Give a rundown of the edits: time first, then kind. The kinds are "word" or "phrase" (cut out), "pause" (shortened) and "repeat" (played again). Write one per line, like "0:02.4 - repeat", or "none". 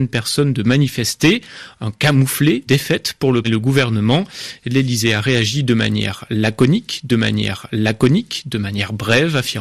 0:02.7 - word
0:03.4 - word
0:07.1 - repeat